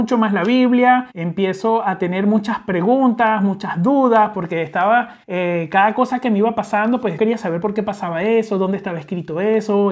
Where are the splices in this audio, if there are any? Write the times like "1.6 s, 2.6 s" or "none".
1.1 s, 5.2 s, 7.2 s